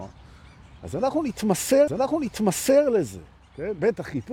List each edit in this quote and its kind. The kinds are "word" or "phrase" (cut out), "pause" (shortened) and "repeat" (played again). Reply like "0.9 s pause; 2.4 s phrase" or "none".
1.9 s repeat